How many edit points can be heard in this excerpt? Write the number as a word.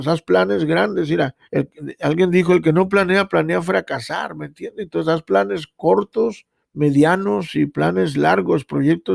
two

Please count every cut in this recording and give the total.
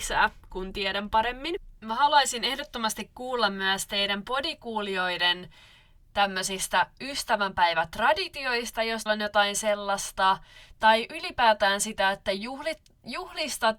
one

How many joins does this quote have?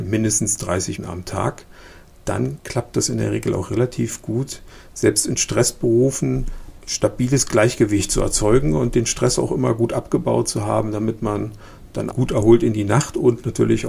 three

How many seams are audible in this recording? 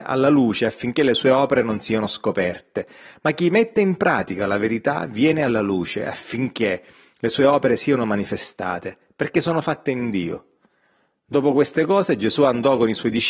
zero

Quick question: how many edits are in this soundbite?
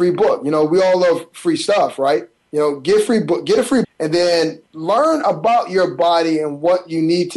three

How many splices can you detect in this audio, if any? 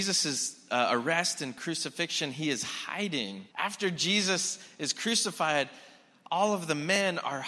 one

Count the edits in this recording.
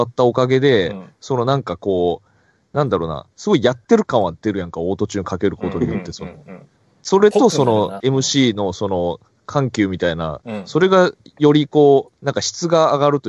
two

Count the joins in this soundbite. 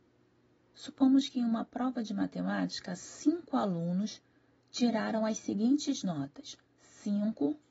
one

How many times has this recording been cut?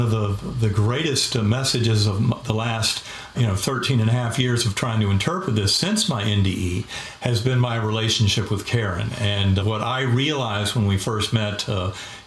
two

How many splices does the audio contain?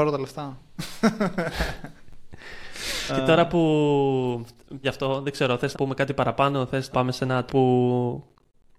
five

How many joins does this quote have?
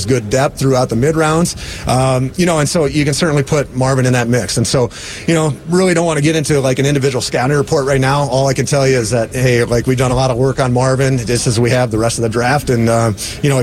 zero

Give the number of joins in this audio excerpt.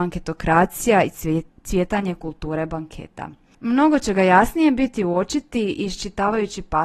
zero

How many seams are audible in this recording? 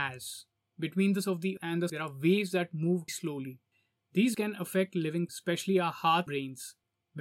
seven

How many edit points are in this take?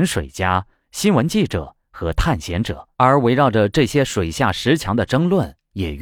one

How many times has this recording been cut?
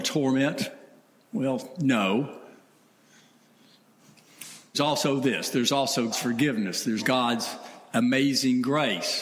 three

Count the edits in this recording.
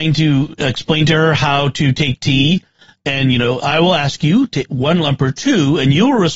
zero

